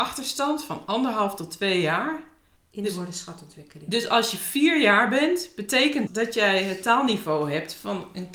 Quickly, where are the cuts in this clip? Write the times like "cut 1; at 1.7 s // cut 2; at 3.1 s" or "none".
cut 1; at 2.6 s // cut 2; at 6.1 s